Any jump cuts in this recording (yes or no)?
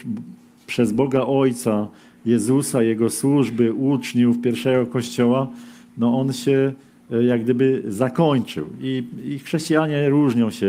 no